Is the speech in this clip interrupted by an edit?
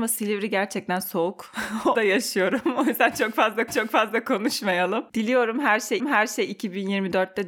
yes; 3 cuts; at 1.9 s, 3.7 s, 6.0 s

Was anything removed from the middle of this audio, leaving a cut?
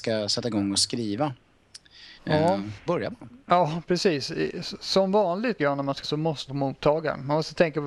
yes; 6 cuts; at 2.2 s, 2.9 s, 3.4 s, 5.6 s, 6.0 s, 6.5 s

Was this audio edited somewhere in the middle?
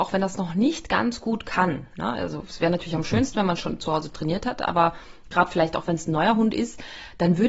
no; 0 cuts

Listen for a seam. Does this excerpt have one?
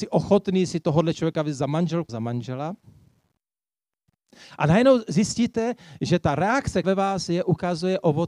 yes; 3 cuts; at 2.1 s, 6.0 s, 6.8 s

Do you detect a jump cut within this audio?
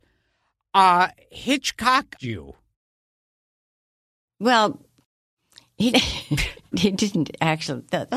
yes; 3 cuts; at 2.2 s, 5.9 s, 6.7 s

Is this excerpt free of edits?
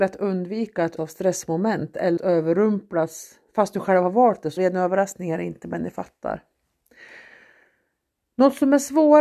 no; 3 cuts; at 1.0 s, 2.2 s, 4.6 s

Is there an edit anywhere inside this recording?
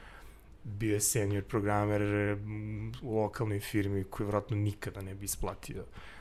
no; 0 cuts

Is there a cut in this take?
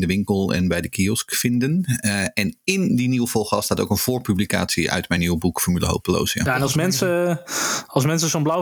no; 0 cuts

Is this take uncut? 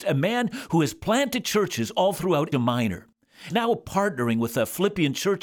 no; 2 cuts; at 2.5 s, 3.5 s

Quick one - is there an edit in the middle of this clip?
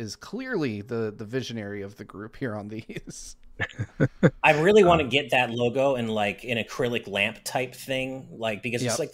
no; 0 cuts

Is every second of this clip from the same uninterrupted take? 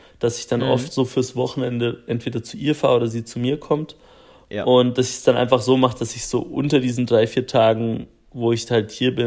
yes; 0 cuts

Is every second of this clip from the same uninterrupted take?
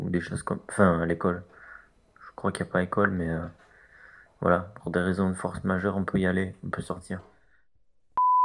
yes; 0 cuts

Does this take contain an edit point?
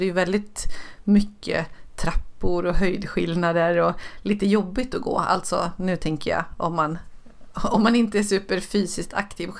no; 0 cuts

